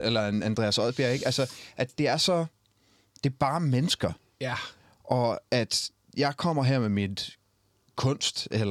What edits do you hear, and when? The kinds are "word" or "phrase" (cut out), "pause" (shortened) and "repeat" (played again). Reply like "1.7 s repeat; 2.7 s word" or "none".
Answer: none